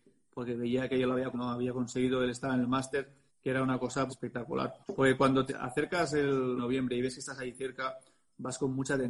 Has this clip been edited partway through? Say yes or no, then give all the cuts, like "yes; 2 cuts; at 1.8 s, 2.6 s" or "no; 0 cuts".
yes; 6 cuts; at 1.3 s, 3.3 s, 4.1 s, 4.8 s, 5.5 s, 6.6 s